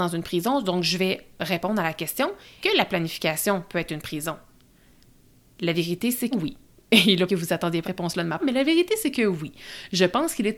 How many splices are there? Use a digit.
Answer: 5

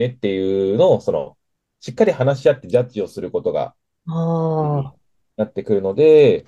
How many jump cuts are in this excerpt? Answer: 0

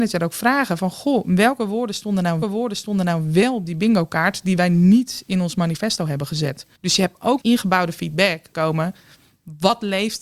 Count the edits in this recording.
4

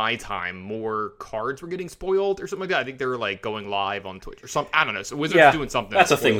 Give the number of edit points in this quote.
0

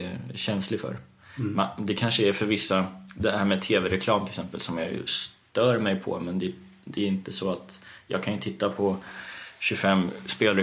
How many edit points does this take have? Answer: 0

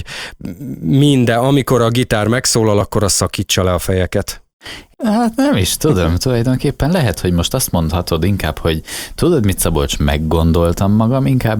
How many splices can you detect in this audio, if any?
0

